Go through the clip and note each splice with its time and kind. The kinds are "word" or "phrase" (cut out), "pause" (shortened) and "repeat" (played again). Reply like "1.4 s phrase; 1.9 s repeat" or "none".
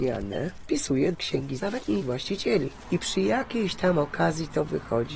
1.1 s word; 1.6 s word; 2.0 s word; 3.0 s word